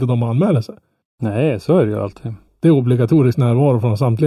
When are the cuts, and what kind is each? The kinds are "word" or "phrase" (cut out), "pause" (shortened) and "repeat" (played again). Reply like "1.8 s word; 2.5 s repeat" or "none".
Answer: none